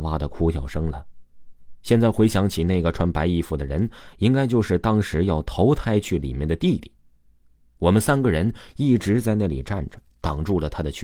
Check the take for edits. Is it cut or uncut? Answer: uncut